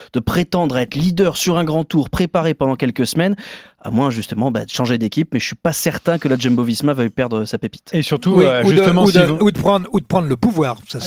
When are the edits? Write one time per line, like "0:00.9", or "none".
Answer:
none